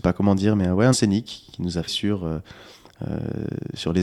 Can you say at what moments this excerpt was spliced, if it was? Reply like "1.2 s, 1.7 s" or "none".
0.9 s, 1.9 s